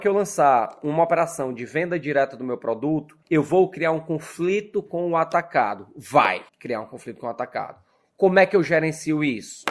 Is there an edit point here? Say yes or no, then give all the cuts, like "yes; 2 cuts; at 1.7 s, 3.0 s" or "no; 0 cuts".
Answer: yes; 2 cuts; at 3.2 s, 6.5 s